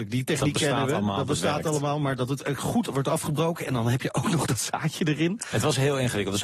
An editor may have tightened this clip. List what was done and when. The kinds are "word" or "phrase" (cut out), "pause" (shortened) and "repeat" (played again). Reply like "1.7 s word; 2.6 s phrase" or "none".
none